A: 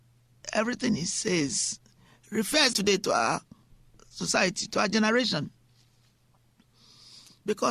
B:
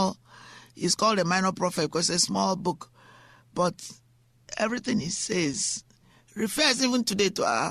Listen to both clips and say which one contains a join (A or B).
A